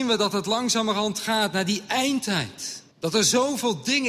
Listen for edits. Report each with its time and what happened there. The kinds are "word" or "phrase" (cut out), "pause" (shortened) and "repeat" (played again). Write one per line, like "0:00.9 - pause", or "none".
0:02.9 - pause